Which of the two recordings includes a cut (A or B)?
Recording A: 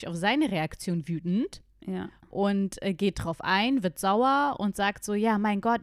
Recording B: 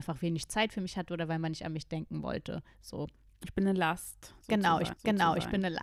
B